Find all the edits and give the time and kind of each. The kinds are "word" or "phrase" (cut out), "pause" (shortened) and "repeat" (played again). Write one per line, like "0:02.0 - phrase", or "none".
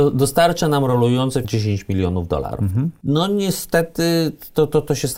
0:01.4 - phrase